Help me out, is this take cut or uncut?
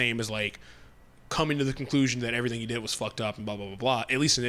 uncut